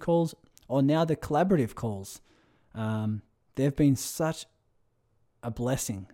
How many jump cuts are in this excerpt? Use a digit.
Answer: 0